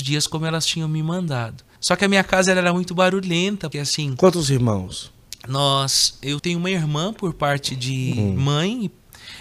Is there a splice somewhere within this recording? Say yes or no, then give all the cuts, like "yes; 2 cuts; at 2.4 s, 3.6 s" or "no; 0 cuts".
yes; 3 cuts; at 1.8 s, 3.7 s, 6.4 s